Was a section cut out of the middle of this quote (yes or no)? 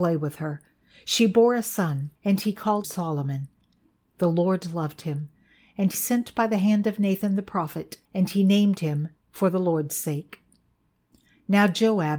yes